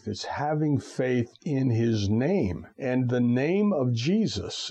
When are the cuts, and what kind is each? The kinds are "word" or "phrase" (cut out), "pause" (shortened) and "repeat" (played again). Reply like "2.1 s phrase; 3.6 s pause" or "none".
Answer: 2.7 s pause